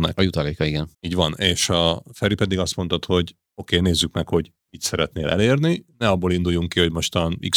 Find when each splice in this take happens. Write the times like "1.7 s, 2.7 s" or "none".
0.9 s